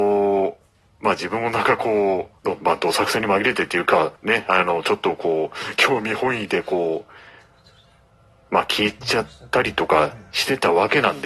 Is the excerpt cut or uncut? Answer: cut